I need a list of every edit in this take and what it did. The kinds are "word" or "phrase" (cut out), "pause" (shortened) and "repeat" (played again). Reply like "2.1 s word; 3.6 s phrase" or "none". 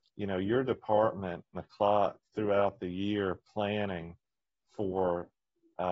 1.5 s phrase; 2.3 s pause

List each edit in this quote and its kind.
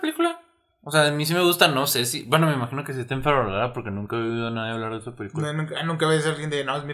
none

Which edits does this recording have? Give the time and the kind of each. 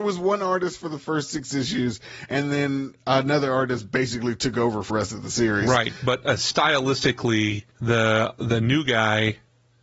4.9 s word; 7.7 s pause

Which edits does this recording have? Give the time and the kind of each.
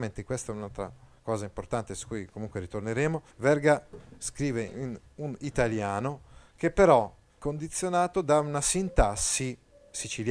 3.3 s pause; 7.4 s word

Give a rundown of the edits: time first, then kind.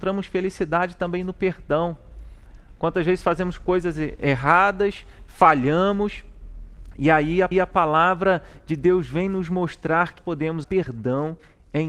7.5 s repeat; 10.2 s word; 10.6 s word

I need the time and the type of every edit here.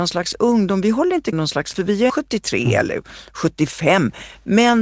1.3 s word; 1.7 s word; 2.1 s word

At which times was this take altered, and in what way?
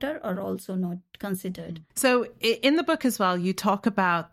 1.9 s pause

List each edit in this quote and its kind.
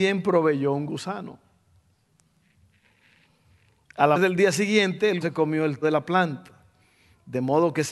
4.1 s word; 5.2 s word; 5.8 s word

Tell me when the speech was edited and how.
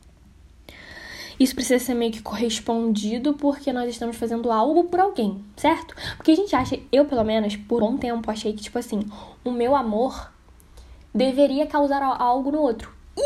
7.8 s word

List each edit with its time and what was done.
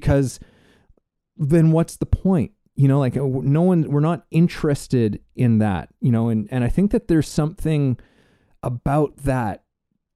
none

